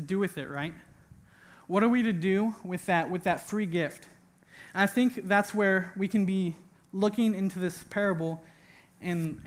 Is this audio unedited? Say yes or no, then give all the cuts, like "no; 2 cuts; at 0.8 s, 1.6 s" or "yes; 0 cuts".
yes; 0 cuts